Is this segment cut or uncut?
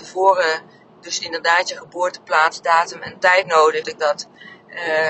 cut